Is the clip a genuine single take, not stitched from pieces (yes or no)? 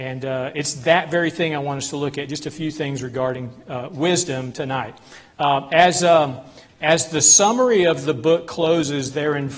yes